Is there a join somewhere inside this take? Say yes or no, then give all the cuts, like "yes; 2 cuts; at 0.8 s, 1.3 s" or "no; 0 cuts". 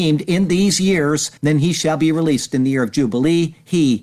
yes; 1 cut; at 1.4 s